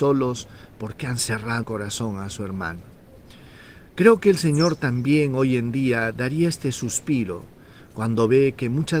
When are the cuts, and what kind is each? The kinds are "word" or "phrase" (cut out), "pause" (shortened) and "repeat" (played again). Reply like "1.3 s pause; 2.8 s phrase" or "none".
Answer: 1.6 s word